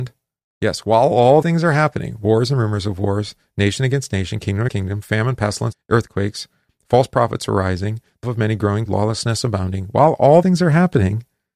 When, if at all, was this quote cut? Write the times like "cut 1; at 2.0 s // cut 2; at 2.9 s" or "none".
cut 1; at 1.4 s // cut 2; at 4.7 s // cut 3; at 5.7 s // cut 4; at 8.2 s // cut 5; at 8.9 s // cut 6; at 10.4 s